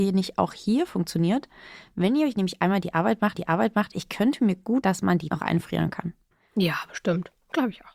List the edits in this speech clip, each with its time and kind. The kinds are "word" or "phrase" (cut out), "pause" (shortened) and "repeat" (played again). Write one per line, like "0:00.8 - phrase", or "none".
0:03.3 - repeat
0:04.8 - word
0:05.3 - word